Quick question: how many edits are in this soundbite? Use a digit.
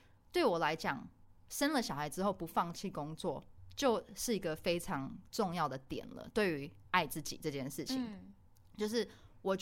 1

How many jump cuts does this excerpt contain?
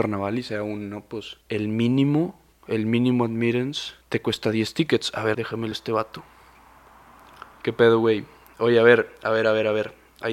6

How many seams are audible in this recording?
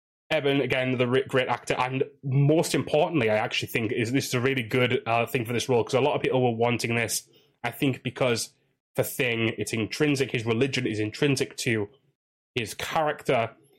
0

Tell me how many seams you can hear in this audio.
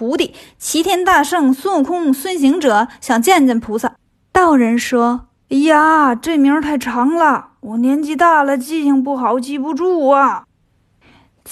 1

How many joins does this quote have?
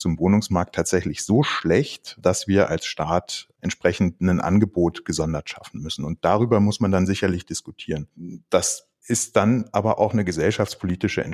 0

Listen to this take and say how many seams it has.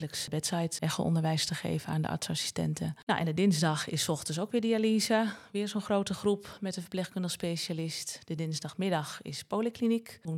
0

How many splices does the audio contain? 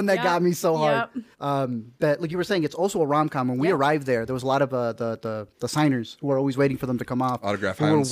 2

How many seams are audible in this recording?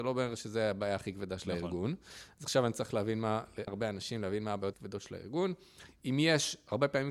2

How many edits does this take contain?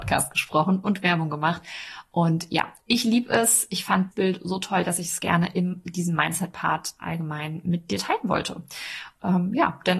2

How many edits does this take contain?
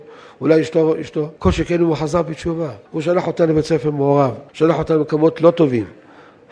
3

